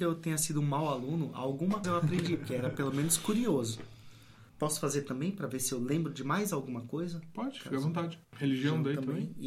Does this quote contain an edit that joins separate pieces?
yes; 3 cuts; at 1.8 s, 4.5 s, 8.2 s

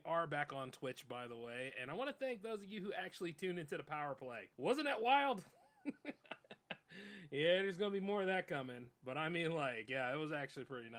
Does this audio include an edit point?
yes; 1 cut; at 4.5 s

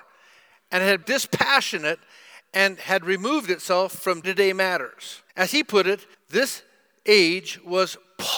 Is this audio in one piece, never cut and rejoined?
no; 4 cuts; at 1.0 s, 4.2 s, 5.3 s, 6.1 s

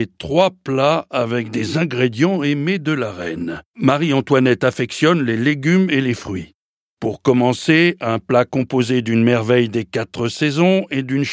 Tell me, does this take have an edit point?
yes; 2 cuts; at 3.7 s, 6.8 s

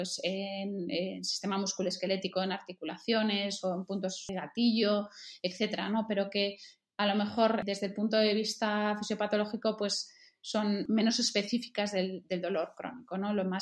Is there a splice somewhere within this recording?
no; 0 cuts

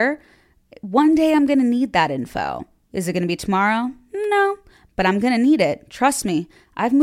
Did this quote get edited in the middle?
no; 0 cuts

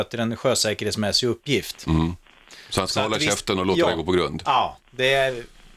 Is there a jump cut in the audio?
no; 0 cuts

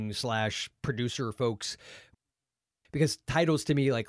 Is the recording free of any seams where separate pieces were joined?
yes; 0 cuts

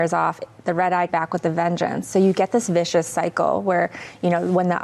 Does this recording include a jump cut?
yes; 1 cut; at 1.1 s

